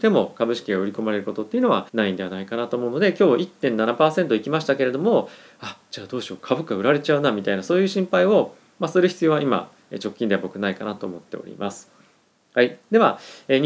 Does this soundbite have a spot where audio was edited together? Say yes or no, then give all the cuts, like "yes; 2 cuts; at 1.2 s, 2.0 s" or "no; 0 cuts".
yes; 1 cut; at 1.9 s